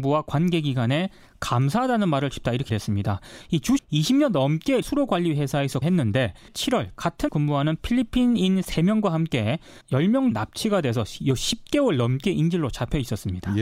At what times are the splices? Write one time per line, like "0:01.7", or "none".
0:02.3
0:02.7
0:03.8
0:04.8
0:05.8
0:06.5
0:07.3
0:09.8
0:10.3